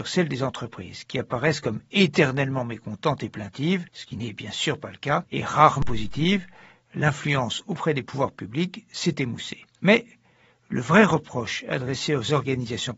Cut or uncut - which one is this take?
uncut